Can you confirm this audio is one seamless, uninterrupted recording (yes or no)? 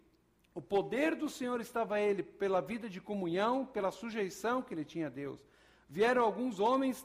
yes